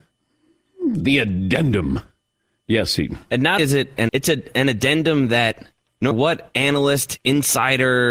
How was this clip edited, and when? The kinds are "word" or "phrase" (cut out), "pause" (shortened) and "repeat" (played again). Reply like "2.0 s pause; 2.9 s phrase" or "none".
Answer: 3.6 s word; 4.1 s word; 6.1 s word